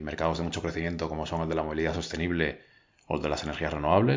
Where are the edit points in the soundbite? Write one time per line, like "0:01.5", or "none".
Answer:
none